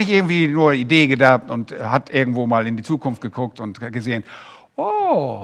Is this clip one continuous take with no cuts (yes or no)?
yes